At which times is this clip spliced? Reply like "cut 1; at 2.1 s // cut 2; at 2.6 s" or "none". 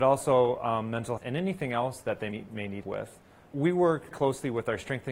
cut 1; at 1.2 s // cut 2; at 2.3 s // cut 3; at 2.8 s // cut 4; at 4.1 s